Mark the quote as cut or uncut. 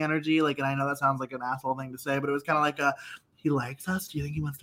uncut